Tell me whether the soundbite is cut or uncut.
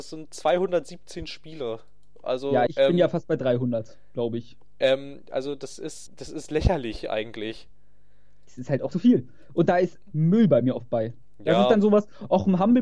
cut